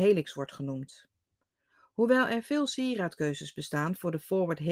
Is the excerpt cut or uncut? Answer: uncut